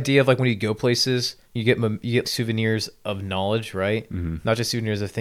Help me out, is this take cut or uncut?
cut